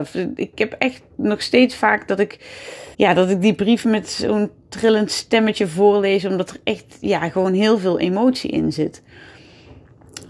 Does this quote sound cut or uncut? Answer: cut